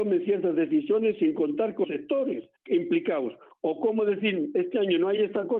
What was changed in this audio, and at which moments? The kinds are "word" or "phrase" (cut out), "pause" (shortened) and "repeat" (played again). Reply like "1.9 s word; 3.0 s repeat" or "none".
1.8 s word; 2.6 s pause